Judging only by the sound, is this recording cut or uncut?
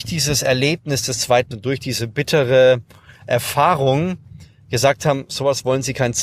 cut